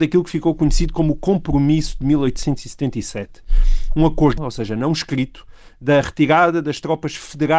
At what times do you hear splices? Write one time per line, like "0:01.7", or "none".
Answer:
0:04.4